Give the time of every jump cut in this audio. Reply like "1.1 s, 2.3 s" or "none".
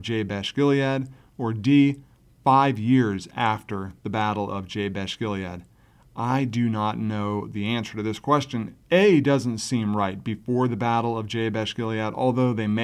8.8 s